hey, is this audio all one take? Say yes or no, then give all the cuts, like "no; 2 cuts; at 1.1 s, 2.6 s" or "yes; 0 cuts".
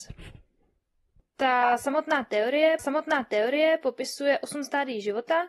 no; 1 cut; at 2.8 s